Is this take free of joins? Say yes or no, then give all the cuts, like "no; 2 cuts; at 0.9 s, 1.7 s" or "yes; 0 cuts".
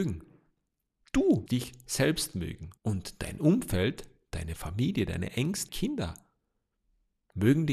no; 3 cuts; at 1.5 s, 2.8 s, 5.7 s